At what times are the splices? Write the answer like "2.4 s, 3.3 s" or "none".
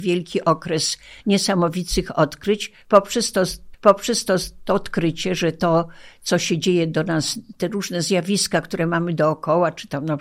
3.7 s